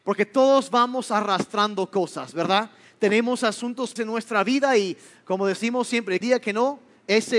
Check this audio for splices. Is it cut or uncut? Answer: cut